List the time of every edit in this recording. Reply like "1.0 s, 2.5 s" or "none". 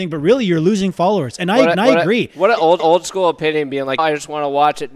1.7 s, 2.8 s, 4.0 s